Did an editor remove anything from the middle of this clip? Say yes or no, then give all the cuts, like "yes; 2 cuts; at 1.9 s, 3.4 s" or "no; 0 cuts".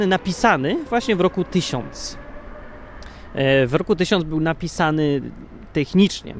no; 0 cuts